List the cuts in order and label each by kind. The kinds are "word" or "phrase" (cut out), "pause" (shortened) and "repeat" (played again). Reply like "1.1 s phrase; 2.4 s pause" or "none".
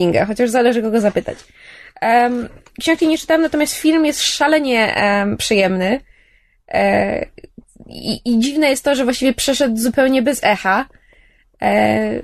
none